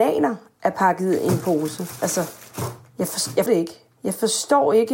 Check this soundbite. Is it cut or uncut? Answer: cut